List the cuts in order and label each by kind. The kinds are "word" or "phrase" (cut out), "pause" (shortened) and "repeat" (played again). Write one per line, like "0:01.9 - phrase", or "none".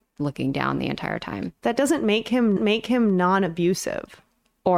0:02.6 - repeat